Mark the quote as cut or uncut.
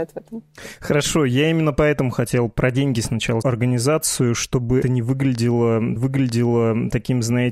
cut